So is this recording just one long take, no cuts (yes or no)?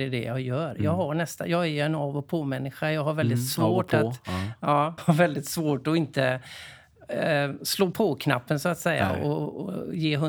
no